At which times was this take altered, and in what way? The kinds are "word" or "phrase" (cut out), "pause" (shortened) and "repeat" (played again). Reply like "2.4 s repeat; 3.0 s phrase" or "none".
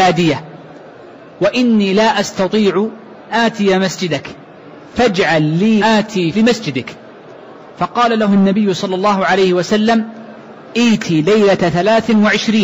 3.3 s word; 5.8 s word; 6.3 s word